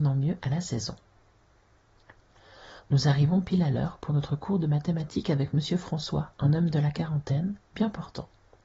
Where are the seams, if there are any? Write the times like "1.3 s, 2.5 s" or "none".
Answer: none